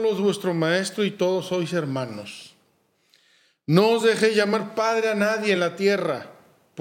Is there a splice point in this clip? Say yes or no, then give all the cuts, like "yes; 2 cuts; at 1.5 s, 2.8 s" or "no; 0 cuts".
no; 0 cuts